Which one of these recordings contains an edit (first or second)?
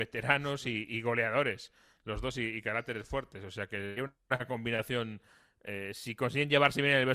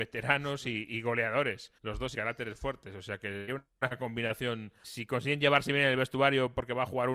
second